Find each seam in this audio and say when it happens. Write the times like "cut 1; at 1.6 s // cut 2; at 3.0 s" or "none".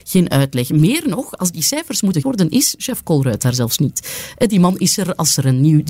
cut 1; at 2.2 s